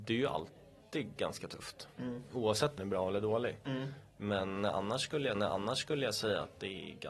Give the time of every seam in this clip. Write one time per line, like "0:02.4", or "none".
0:02.8
0:05.3